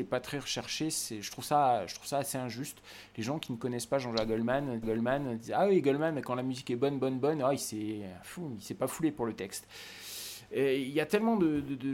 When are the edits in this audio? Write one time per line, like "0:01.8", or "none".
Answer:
0:04.8